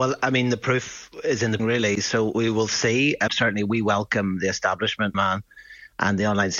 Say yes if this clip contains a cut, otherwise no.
yes